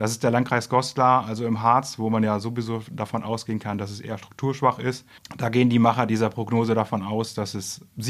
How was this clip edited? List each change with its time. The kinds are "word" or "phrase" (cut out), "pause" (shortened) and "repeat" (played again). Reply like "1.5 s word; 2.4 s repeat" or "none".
none